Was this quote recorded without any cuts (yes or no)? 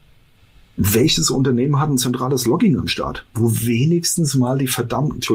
yes